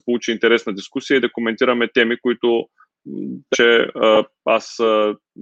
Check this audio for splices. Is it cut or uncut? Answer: cut